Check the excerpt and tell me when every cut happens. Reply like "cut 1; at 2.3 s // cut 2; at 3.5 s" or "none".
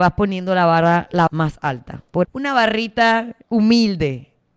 cut 1; at 1.3 s // cut 2; at 2.2 s // cut 3; at 3.4 s